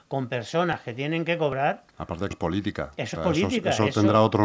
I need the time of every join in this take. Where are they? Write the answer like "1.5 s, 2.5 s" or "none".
2.3 s, 3.1 s